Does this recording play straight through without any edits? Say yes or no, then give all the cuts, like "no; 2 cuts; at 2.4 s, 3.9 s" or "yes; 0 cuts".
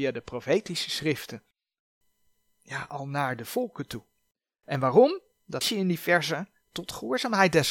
no; 1 cut; at 5.6 s